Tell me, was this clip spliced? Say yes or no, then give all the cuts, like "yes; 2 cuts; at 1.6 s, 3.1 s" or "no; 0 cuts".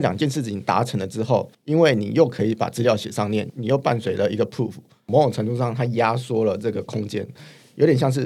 no; 0 cuts